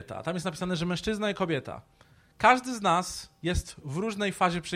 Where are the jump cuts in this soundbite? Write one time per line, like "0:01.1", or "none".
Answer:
none